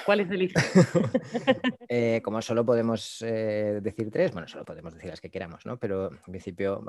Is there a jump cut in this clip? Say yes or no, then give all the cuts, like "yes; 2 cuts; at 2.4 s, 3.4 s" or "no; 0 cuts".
yes; 1 cut; at 4.6 s